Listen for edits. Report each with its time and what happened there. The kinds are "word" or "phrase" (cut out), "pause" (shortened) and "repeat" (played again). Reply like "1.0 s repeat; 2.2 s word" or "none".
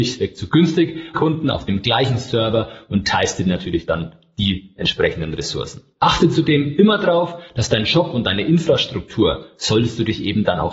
1.1 s phrase